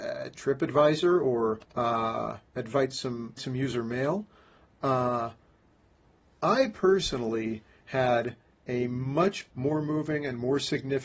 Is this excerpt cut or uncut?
cut